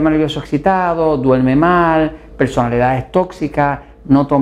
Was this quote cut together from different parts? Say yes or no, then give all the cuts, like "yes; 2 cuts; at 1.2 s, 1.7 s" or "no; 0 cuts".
no; 0 cuts